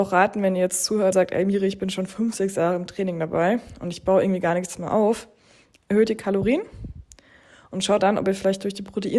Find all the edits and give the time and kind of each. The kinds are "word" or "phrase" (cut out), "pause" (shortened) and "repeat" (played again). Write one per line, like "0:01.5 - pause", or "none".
0:01.1 - word
0:08.0 - word